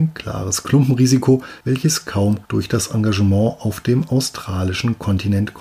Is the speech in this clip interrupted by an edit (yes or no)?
yes